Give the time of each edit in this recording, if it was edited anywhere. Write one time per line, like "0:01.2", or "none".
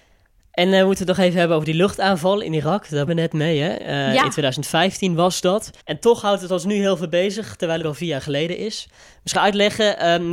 0:03.1
0:05.8
0:07.8
0:09.3